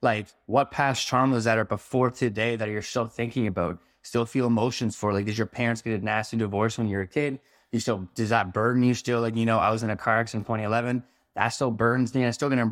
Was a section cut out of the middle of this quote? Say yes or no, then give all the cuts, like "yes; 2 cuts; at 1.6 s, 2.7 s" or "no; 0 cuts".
no; 0 cuts